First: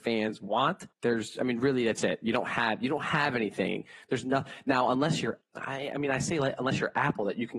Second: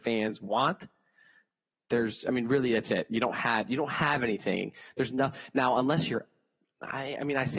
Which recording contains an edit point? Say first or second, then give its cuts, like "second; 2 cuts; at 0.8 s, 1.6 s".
first; 2 cuts; at 0.9 s, 5.4 s